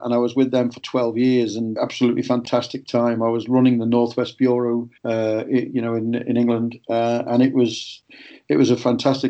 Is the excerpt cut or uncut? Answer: cut